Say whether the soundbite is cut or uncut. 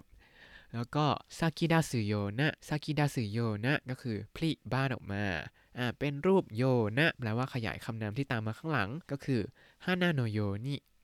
cut